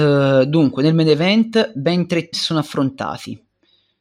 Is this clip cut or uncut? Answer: cut